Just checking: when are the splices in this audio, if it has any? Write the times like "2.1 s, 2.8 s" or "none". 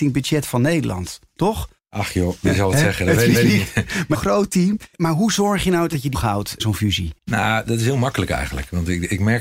1.8 s, 3.3 s, 4.1 s, 4.9 s, 6.1 s, 6.6 s, 7.2 s